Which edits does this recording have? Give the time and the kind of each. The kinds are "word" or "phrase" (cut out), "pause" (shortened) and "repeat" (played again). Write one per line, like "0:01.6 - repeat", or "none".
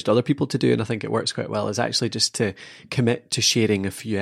none